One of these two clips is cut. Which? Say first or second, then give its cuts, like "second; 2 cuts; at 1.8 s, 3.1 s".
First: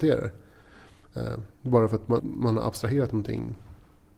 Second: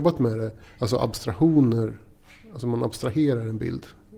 first; 2 cuts; at 1.5 s, 2.2 s